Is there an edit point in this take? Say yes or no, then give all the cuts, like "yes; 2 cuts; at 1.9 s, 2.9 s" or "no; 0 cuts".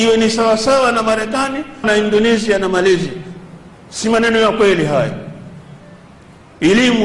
yes; 1 cut; at 1.8 s